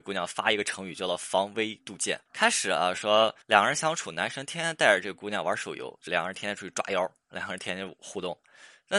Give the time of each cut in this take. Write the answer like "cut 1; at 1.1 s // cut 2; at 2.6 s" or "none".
cut 1; at 2.3 s // cut 2; at 3.4 s // cut 3; at 6.1 s